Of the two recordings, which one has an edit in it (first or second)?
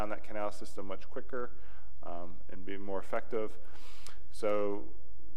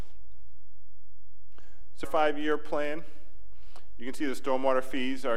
second